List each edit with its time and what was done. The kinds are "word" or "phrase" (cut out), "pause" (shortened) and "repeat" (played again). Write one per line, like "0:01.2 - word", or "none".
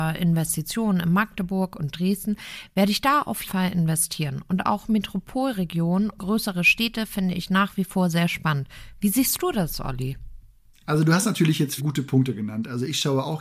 0:03.4 - word
0:06.2 - word
0:11.8 - word